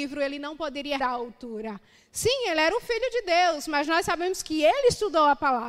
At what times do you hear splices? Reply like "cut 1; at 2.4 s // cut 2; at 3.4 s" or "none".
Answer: cut 1; at 1.0 s